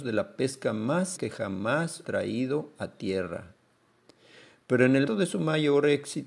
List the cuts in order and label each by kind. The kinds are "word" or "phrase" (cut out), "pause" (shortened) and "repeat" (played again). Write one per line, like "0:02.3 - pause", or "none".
0:01.2 - word
0:02.0 - word
0:05.1 - word